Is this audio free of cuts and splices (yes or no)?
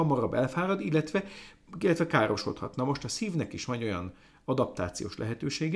yes